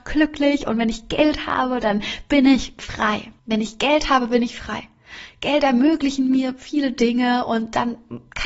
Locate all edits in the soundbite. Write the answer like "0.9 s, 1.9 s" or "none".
3.4 s